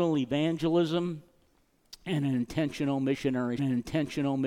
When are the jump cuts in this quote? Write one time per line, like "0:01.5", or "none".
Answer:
0:03.6